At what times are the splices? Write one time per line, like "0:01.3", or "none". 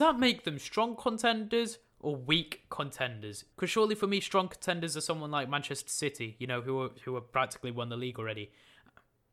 0:03.5